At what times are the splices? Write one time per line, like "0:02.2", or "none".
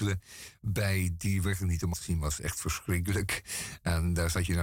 0:01.9